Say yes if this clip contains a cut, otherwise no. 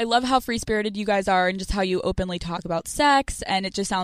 no